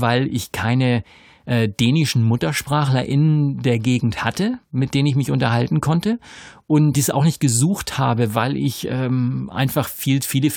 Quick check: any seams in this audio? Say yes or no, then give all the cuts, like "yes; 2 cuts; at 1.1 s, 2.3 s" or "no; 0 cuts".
yes; 1 cut; at 6.9 s